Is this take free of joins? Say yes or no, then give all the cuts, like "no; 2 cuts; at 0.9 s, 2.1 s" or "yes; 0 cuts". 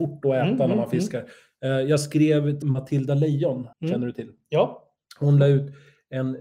no; 2 cuts; at 2.6 s, 3.7 s